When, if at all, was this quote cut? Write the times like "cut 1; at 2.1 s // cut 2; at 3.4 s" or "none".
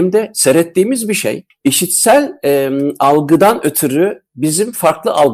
none